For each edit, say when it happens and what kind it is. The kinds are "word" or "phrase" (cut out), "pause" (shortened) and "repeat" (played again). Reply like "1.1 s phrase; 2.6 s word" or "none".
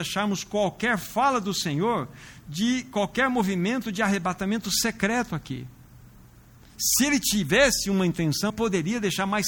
8.5 s word